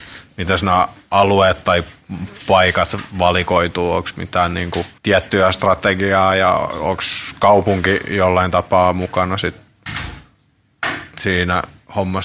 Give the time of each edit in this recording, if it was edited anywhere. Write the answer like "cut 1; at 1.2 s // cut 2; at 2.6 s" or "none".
cut 1; at 5.0 s